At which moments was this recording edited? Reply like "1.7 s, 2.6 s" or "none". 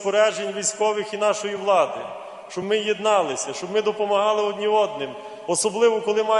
none